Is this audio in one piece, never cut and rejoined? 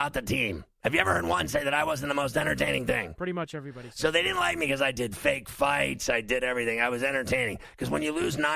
yes; 0 cuts

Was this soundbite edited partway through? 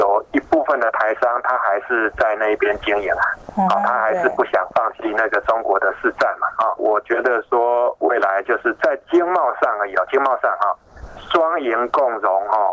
yes; 1 cut; at 6.8 s

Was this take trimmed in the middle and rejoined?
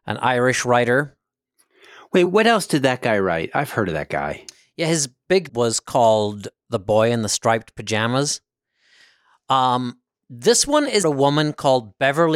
yes; 3 cuts; at 2.3 s, 5.5 s, 11.0 s

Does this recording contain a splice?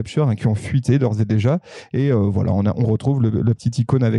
no; 0 cuts

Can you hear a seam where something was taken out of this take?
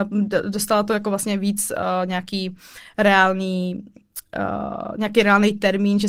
no; 0 cuts

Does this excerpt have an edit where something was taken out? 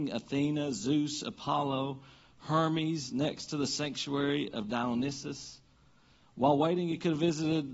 no; 0 cuts

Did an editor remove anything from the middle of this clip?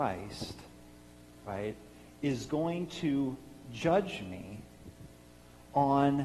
no; 0 cuts

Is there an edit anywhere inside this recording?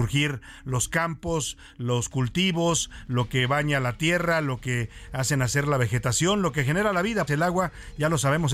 yes; 1 cut; at 7.3 s

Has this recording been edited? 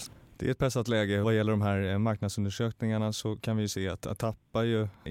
yes; 2 cuts; at 1.2 s, 4.2 s

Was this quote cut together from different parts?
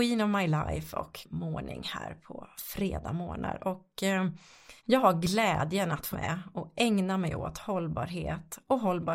yes; 3 cuts; at 1.2 s, 4.8 s, 6.1 s

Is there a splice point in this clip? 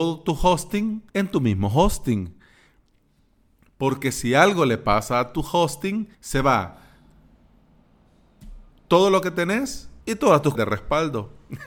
yes; 4 cuts; at 1.1 s, 6.1 s, 10.0 s, 10.5 s

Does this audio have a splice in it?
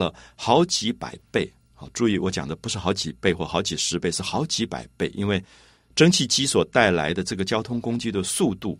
no; 0 cuts

